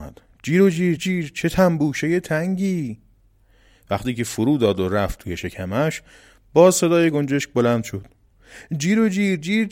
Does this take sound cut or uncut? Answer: cut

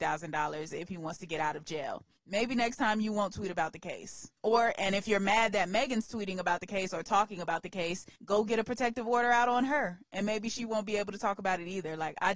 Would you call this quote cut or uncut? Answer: cut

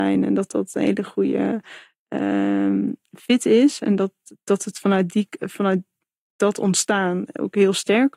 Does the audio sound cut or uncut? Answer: uncut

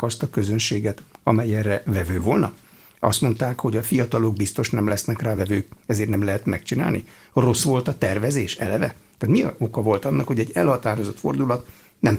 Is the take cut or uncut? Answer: uncut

